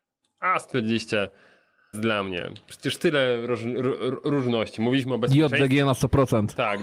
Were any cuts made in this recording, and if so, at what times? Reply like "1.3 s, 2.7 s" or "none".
1.9 s